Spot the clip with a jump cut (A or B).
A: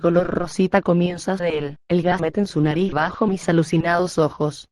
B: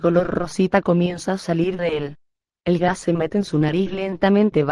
A